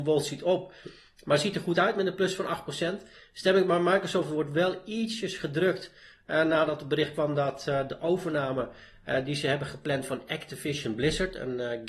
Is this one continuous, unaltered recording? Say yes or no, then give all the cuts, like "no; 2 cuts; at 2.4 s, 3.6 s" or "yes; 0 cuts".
yes; 0 cuts